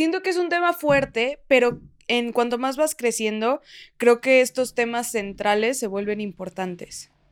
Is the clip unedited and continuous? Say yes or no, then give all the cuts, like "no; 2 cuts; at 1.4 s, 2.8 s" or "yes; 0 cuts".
yes; 0 cuts